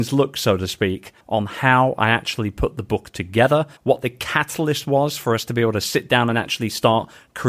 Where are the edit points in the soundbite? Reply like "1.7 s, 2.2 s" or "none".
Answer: 1.2 s, 3.8 s